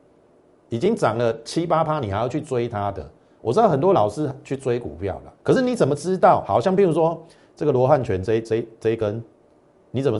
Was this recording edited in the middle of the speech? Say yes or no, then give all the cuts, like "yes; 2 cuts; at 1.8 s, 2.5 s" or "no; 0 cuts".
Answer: yes; 1 cut; at 5.4 s